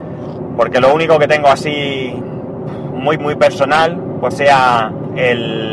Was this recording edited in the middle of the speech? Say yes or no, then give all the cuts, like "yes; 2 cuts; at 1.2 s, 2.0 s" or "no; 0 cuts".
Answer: yes; 2 cuts; at 3.2 s, 4.3 s